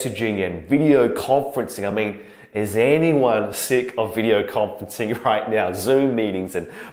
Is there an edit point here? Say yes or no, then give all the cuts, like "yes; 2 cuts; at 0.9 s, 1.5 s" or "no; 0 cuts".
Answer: no; 0 cuts